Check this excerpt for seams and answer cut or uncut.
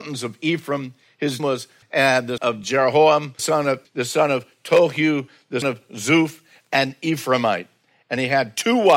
cut